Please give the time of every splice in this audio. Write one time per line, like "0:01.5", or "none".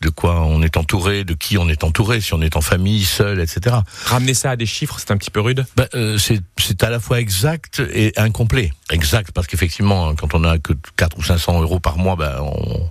0:05.7
0:06.5
0:08.8